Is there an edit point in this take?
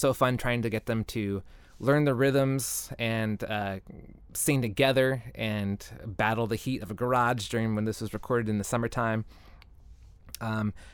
no; 0 cuts

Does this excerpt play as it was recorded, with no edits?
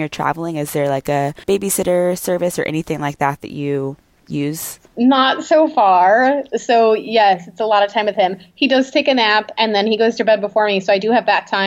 no; 2 cuts; at 1.4 s, 4.9 s

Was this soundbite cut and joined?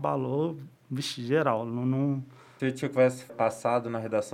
yes; 2 cuts; at 2.6 s, 3.3 s

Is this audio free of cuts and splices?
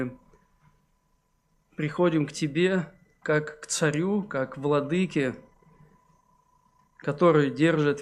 yes; 0 cuts

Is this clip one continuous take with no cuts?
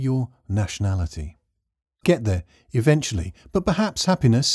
no; 1 cut; at 2.0 s

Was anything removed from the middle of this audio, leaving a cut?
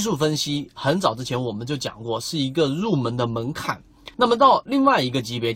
yes; 1 cut; at 4.1 s

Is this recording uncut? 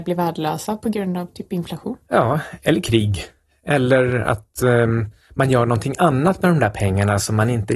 yes; 0 cuts

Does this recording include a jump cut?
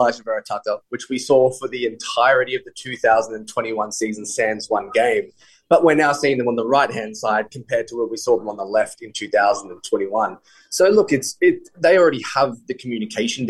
no; 0 cuts

